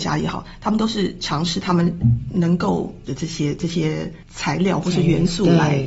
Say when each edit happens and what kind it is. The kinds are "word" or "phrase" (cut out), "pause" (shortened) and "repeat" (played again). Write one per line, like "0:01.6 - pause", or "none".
0:03.1 - word